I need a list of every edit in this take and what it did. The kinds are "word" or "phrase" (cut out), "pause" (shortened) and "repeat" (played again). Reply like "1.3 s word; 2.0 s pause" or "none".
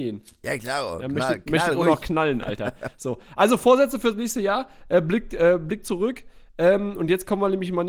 none